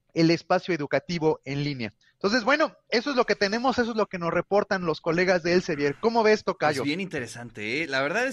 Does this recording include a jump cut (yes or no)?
no